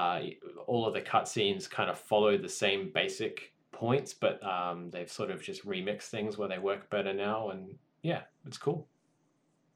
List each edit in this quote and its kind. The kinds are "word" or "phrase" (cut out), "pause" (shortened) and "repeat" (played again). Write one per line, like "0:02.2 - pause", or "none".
0:03.6 - pause